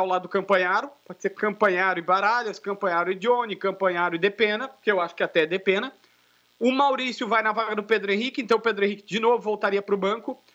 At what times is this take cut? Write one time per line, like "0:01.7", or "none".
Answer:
none